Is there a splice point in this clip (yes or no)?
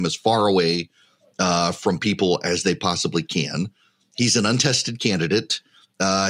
no